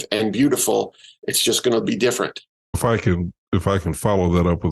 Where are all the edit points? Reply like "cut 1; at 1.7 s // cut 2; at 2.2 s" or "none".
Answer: cut 1; at 2.7 s